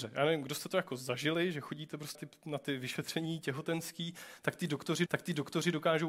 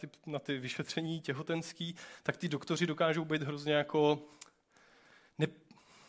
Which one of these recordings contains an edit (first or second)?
first